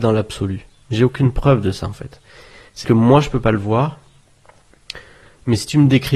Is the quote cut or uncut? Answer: cut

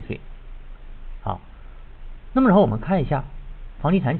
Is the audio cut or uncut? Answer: cut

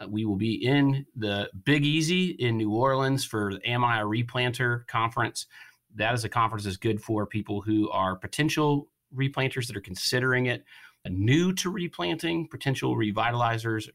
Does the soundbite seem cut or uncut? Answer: uncut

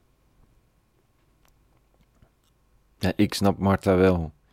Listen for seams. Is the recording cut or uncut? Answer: uncut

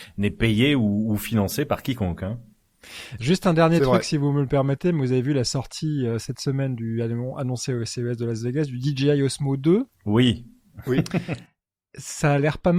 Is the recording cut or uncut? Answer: uncut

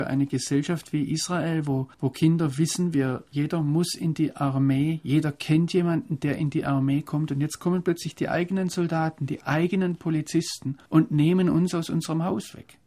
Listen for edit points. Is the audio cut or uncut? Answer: cut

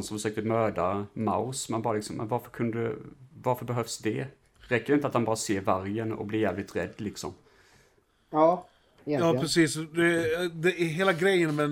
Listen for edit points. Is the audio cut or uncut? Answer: uncut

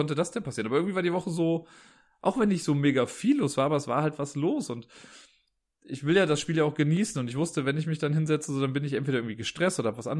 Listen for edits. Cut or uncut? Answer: uncut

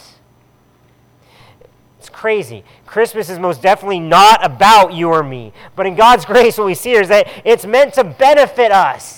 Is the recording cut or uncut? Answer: uncut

